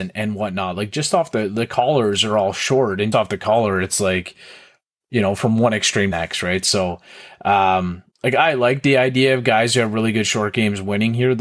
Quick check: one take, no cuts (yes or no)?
no